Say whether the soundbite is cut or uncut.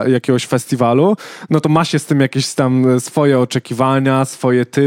uncut